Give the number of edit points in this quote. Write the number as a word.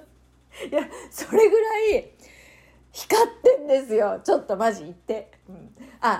zero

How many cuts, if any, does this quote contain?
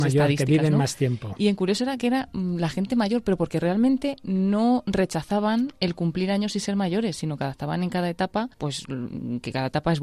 one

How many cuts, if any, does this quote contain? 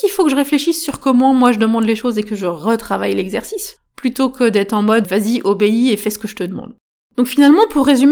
two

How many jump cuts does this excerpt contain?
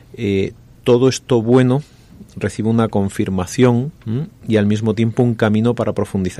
one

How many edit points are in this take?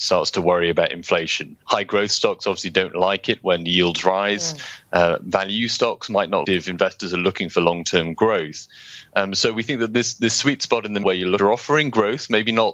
four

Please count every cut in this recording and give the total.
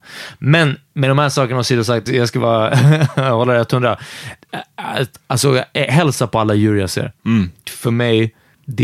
two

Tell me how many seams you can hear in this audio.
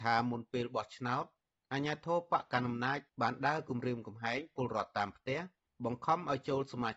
zero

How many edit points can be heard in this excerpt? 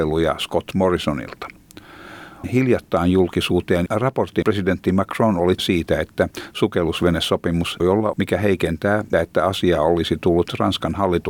seven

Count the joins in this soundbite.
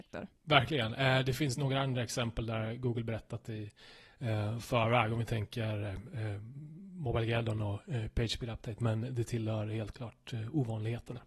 zero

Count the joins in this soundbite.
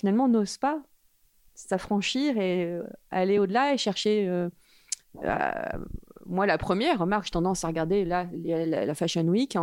zero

